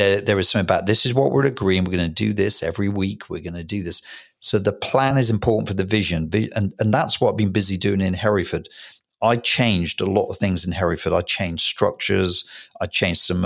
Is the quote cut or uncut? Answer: uncut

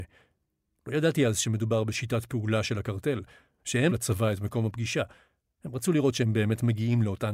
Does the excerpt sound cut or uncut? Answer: cut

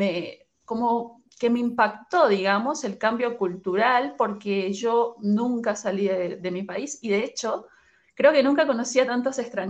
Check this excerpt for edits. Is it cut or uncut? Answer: uncut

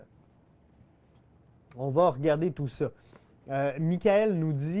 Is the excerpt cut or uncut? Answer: uncut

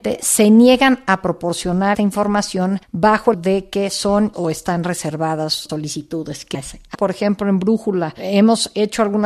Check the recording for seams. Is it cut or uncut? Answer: cut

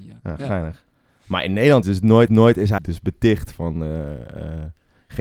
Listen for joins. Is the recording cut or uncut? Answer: cut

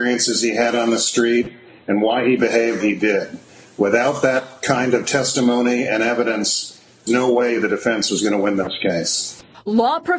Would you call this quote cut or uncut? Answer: cut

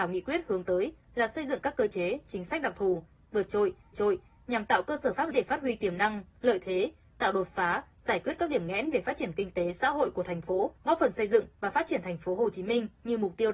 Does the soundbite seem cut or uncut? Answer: cut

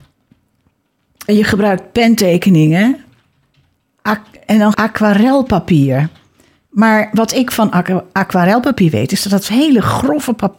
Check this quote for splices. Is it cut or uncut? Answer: cut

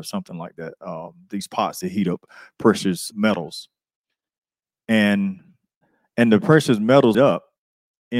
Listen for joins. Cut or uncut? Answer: cut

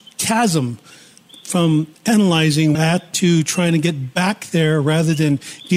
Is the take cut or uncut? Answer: cut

